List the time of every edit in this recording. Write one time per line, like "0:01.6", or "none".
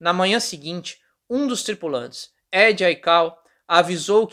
none